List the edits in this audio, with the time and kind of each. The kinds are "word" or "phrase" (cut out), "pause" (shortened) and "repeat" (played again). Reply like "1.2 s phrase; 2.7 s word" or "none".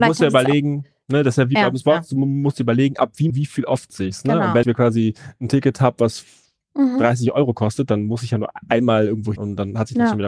3.3 s word; 3.9 s word; 4.6 s word; 9.4 s word